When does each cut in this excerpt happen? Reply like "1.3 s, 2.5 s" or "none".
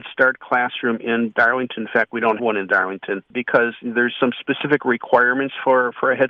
2.4 s

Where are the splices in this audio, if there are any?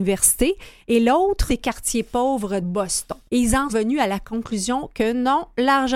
1.5 s, 2.6 s, 3.3 s, 3.7 s

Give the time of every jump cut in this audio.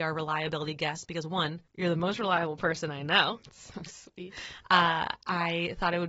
1.7 s

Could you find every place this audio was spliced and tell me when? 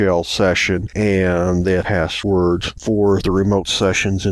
1.8 s, 2.8 s

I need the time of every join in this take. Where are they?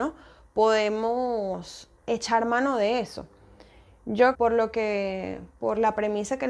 2.0 s, 4.3 s

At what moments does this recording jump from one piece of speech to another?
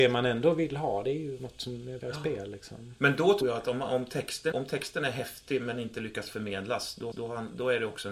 2.0 s, 3.4 s, 4.5 s, 7.1 s

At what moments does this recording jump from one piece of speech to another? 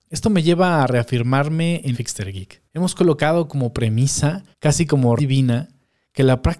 1.9 s, 2.7 s, 4.5 s, 5.2 s

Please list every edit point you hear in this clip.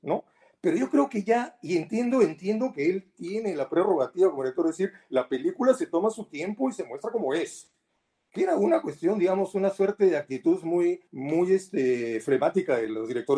11.1 s

